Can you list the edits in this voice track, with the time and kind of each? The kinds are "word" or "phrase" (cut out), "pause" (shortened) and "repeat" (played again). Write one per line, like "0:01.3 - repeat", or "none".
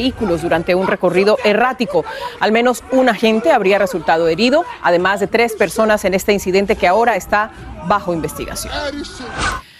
none